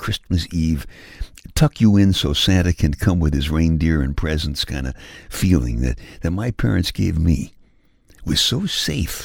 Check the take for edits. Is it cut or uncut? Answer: uncut